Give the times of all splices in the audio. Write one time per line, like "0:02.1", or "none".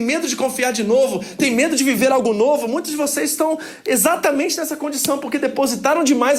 none